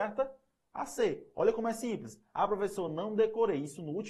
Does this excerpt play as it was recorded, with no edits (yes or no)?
yes